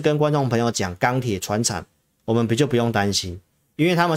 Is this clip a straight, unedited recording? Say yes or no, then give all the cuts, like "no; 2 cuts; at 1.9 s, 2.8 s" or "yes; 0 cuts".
yes; 0 cuts